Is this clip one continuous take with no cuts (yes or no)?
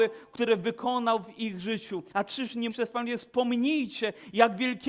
no